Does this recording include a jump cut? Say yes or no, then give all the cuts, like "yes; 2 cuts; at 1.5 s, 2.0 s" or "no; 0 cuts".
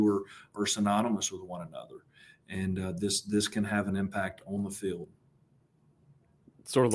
no; 0 cuts